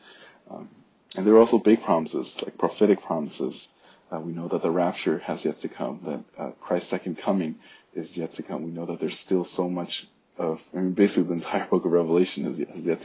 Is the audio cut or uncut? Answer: cut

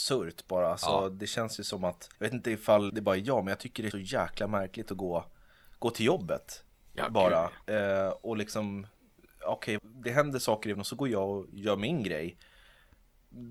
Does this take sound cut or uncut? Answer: cut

